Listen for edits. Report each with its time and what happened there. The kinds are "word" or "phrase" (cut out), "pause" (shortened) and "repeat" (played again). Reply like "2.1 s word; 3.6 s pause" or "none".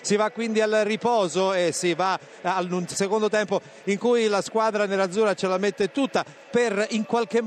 none